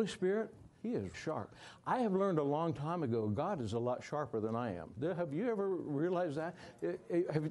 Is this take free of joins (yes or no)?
no